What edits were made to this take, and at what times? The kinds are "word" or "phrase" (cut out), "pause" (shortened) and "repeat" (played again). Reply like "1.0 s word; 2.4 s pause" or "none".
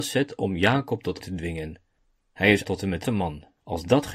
1.2 s word; 2.0 s pause; 2.6 s word; 3.0 s word